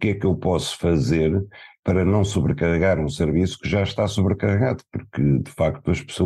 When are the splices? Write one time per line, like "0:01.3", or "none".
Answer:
none